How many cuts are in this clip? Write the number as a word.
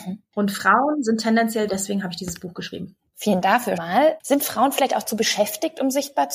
three